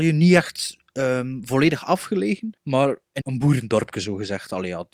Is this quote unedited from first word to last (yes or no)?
no